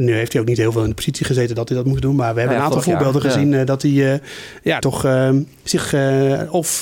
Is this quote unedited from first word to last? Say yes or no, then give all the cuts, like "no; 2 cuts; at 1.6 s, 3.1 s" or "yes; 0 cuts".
no; 1 cut; at 4.8 s